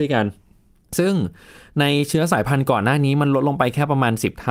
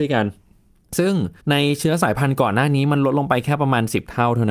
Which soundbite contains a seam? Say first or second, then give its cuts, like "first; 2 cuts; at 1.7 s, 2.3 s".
second; 1 cut; at 1.4 s